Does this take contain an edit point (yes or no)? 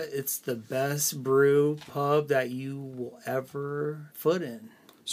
yes